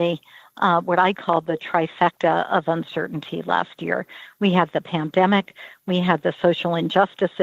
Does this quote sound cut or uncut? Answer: uncut